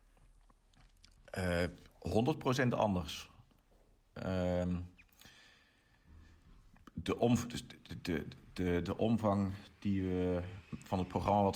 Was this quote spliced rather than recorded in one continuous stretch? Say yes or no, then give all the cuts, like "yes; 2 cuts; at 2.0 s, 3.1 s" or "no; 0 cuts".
no; 0 cuts